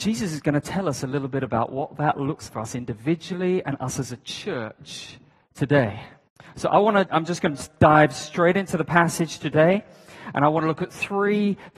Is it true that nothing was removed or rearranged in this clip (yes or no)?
no